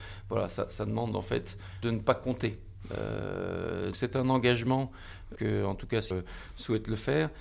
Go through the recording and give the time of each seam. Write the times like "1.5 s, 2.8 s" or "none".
1.8 s, 3.9 s, 5.4 s, 6.1 s

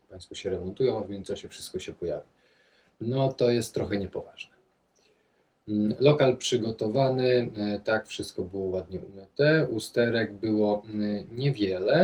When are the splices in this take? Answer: none

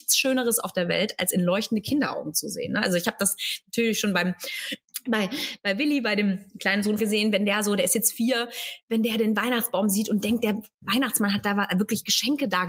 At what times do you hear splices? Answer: 7.0 s

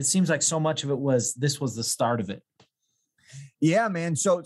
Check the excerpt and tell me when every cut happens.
none

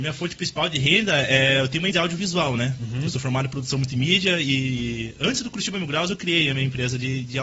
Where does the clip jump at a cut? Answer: 1.9 s

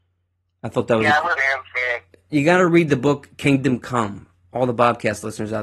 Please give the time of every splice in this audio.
1.4 s

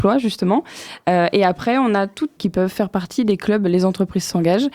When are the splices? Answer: 2.4 s

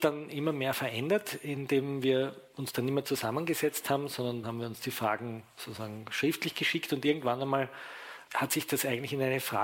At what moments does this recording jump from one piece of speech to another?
4.4 s, 8.3 s

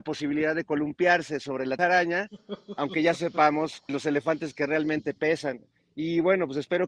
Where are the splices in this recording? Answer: 1.8 s, 3.9 s

